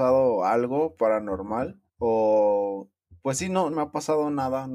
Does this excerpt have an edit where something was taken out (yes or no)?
yes